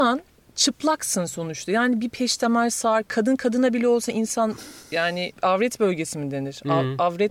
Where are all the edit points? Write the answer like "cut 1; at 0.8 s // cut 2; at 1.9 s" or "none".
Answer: none